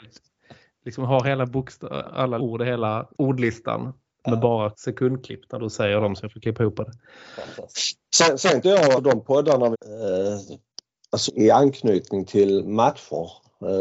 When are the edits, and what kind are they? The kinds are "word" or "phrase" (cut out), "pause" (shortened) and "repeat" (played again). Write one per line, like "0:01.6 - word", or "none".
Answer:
0:02.0 - word
0:02.4 - word
0:03.1 - word
0:04.7 - word
0:08.6 - word
0:08.9 - word
0:09.7 - word
0:11.3 - word